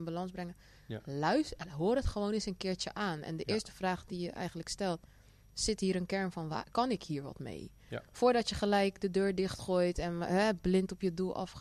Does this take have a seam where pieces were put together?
no; 0 cuts

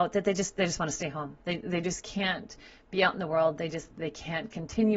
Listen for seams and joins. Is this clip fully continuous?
yes; 0 cuts

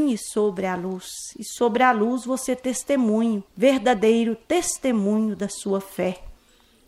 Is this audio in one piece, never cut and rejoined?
no; 1 cut; at 3.5 s

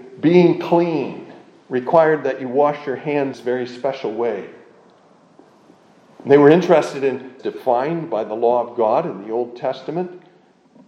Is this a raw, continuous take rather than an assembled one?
no; 2 cuts; at 3.3 s, 7.4 s

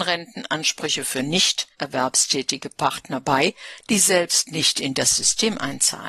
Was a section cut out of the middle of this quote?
yes; 1 cut; at 1.7 s

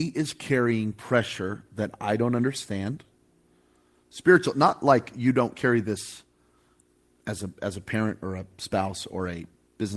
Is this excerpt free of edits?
yes; 0 cuts

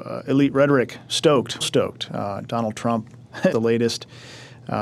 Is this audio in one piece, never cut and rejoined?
no; 2 cuts; at 1.6 s, 3.5 s

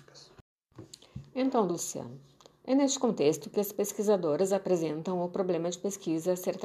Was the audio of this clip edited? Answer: yes; 1 cut; at 1.7 s

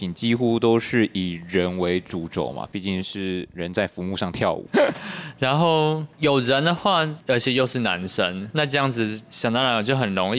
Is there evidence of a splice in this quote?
yes; 3 cuts; at 4.7 s, 6.1 s, 8.5 s

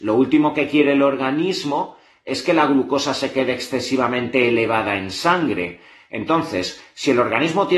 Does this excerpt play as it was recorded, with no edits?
yes; 0 cuts

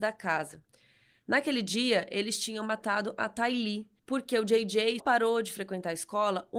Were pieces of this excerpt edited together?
yes; 2 cuts; at 4.0 s, 5.0 s

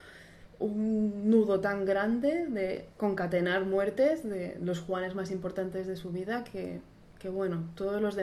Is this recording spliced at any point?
no; 0 cuts

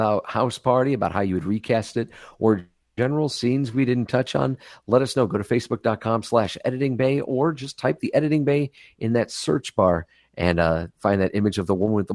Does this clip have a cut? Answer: no; 0 cuts

